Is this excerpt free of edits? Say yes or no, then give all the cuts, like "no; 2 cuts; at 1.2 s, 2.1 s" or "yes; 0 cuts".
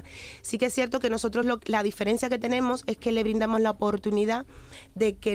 yes; 0 cuts